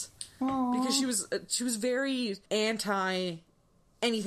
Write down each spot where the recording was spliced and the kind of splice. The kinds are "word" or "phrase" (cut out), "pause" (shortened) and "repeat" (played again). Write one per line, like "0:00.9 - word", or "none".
0:02.5 - pause